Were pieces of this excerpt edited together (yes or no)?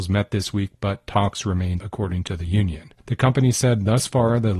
yes